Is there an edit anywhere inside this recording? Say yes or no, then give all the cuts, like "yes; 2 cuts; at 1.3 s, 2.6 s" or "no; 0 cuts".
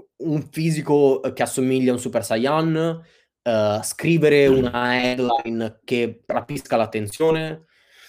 no; 0 cuts